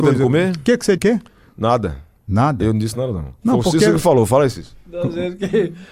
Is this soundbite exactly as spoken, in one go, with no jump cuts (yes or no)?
no